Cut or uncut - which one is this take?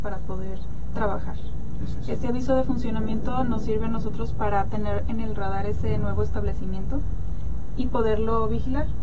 uncut